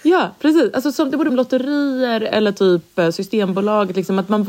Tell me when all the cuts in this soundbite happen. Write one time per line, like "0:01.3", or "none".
0:01.3